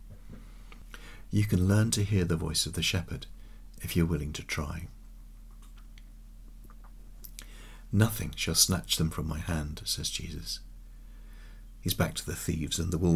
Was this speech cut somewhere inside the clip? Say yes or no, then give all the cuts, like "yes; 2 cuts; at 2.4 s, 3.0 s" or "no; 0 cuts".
no; 0 cuts